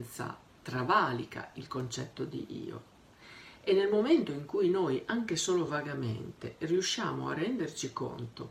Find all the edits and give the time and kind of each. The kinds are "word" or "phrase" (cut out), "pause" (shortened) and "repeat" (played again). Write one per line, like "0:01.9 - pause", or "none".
none